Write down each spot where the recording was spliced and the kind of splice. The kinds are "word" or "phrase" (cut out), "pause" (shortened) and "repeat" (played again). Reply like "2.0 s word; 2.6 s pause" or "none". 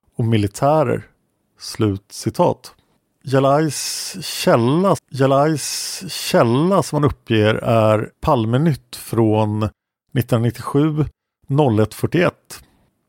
5.0 s repeat; 8.1 s pause